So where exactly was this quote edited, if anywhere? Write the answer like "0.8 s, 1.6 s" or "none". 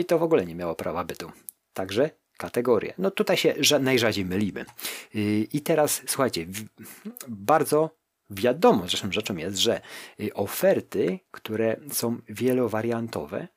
none